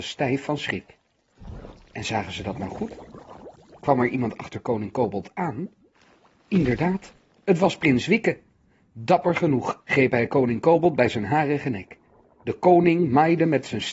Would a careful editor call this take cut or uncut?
uncut